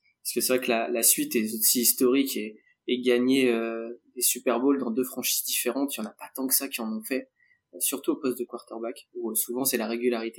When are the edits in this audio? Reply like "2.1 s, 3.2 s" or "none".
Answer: none